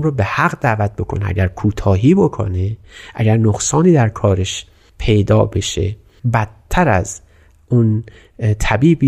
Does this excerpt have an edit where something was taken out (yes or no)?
no